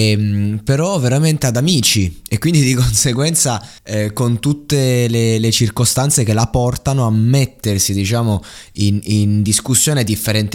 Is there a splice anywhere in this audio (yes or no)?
yes